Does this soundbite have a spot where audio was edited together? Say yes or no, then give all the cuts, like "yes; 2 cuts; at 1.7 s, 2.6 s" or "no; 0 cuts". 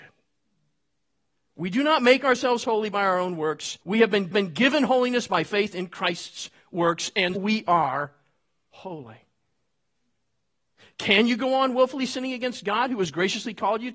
yes; 3 cuts; at 3.8 s, 4.3 s, 7.4 s